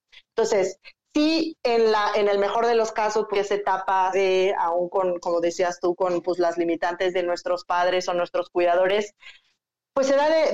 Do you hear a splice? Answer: yes; 3 cuts; at 3.3 s, 4.1 s, 7.1 s

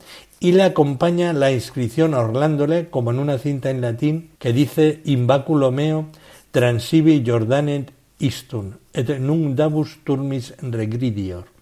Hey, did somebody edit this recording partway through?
yes; 1 cut; at 4.3 s

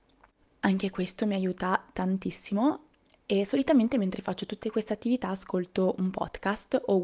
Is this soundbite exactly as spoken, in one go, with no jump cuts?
yes; 0 cuts

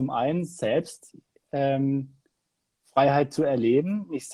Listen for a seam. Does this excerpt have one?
no; 0 cuts

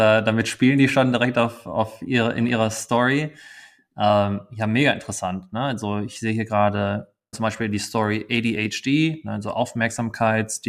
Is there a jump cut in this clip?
yes; 1 cut; at 7.3 s

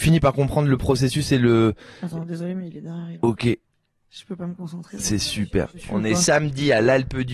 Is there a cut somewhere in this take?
no; 0 cuts

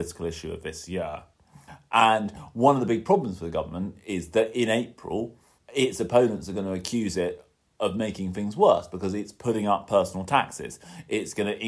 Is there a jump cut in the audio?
yes; 1 cut; at 5.6 s

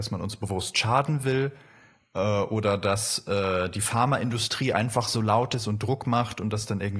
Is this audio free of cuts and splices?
yes; 0 cuts

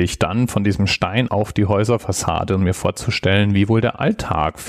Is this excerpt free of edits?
no; 1 cut; at 1.3 s

